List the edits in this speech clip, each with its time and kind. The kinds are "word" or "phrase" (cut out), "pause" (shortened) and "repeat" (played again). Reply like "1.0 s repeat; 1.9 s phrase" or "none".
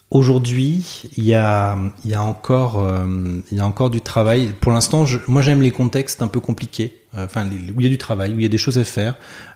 none